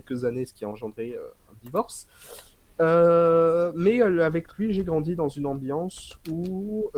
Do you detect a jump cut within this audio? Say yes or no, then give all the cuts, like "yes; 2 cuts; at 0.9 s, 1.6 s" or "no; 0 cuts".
no; 0 cuts